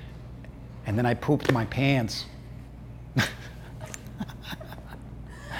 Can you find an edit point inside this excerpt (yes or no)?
no